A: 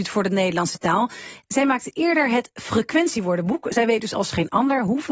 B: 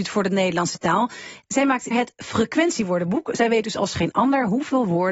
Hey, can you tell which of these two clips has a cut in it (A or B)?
B